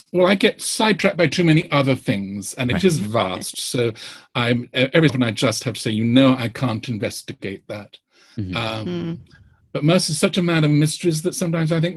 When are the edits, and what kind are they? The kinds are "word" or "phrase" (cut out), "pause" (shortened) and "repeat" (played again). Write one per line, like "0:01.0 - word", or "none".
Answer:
0:05.1 - word

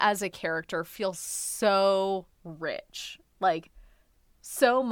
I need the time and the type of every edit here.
0:02.3 - pause

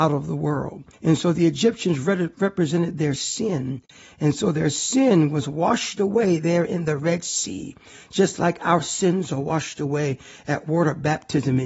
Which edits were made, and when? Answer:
0:00.9 - pause

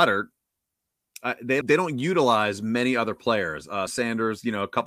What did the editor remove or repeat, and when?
0:01.6 - word
0:03.9 - word

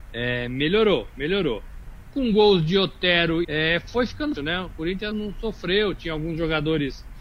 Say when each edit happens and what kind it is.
0:03.4 - phrase
0:04.4 - word
0:05.1 - word

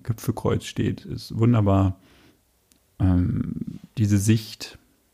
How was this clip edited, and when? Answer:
none

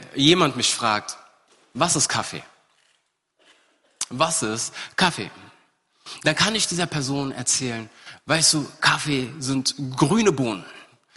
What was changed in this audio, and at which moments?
none

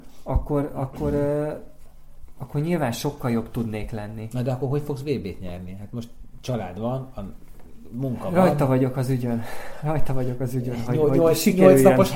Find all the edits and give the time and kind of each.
none

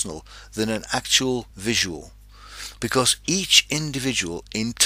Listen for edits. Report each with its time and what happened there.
0:01.5 - pause

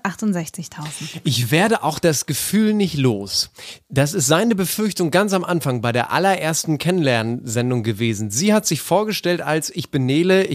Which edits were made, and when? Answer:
none

